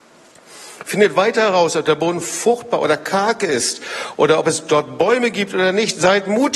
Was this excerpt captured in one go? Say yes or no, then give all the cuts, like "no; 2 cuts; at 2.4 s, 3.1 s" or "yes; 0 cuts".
yes; 0 cuts